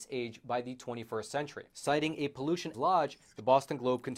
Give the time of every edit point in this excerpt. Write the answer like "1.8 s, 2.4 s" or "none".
1.7 s, 2.7 s

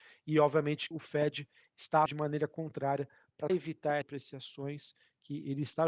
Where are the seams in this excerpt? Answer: 0.9 s, 2.1 s, 3.5 s, 4.0 s

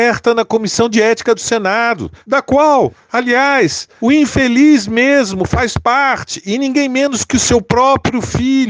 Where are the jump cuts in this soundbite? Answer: none

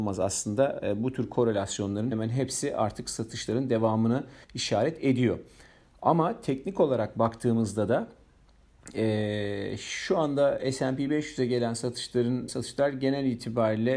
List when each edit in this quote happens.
2.1 s, 4.4 s, 12.5 s

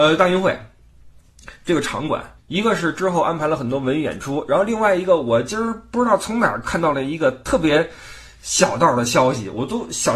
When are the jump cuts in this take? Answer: 2.4 s

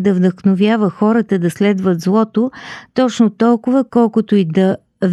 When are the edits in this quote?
none

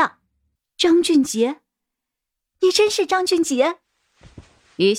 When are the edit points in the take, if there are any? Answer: none

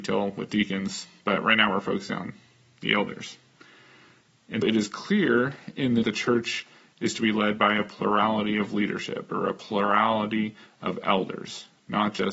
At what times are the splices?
4.6 s, 6.0 s

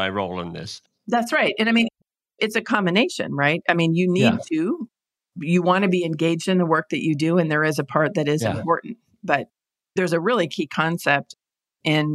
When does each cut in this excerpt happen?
none

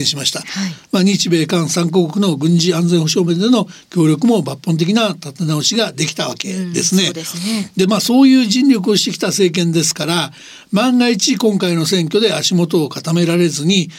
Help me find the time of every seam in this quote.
none

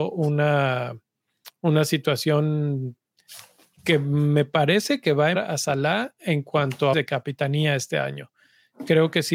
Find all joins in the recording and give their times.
5.3 s, 6.9 s

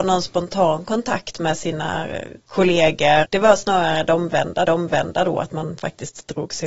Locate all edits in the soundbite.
3.2 s, 4.6 s

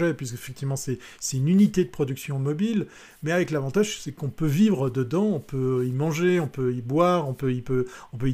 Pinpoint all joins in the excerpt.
none

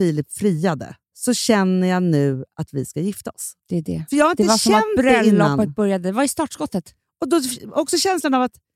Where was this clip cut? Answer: 1.0 s, 3.6 s

